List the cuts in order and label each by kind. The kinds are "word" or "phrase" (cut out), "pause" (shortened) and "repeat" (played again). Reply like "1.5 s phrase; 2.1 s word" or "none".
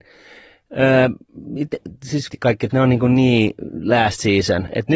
2.3 s word; 2.7 s word